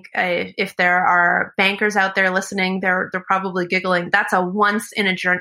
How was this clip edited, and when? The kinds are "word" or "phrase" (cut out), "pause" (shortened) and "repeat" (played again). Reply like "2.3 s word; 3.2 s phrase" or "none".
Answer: none